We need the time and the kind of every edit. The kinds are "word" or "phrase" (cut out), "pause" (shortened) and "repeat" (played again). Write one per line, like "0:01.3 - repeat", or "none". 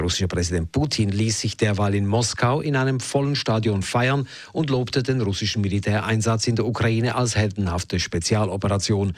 none